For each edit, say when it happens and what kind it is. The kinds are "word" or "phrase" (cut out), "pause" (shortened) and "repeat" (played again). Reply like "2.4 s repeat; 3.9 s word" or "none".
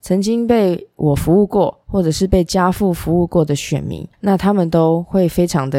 4.1 s pause